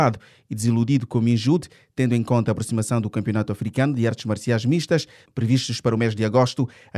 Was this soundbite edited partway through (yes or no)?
no